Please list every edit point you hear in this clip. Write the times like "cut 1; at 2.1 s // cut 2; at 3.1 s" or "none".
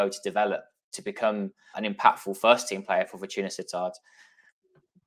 cut 1; at 1.7 s